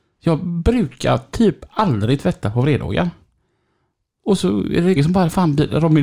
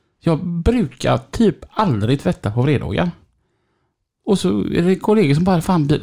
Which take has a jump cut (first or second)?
first